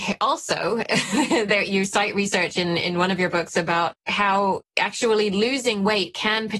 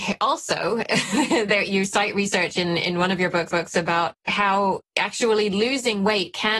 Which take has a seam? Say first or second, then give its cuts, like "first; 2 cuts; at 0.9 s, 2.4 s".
second; 1 cut; at 3.5 s